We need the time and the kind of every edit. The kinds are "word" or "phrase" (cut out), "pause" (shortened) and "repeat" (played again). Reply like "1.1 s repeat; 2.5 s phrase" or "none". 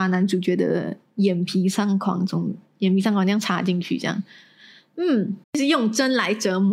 5.4 s pause